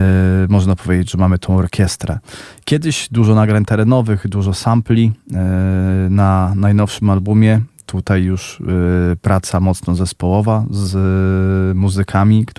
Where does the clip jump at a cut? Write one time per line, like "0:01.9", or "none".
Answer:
none